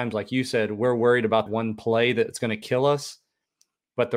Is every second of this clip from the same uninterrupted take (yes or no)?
no